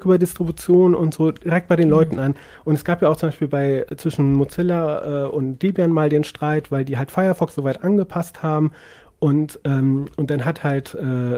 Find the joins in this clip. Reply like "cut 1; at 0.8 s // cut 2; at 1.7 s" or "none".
none